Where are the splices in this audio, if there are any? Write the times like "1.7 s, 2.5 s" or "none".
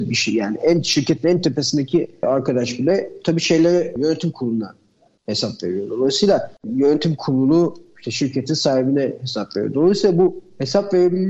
none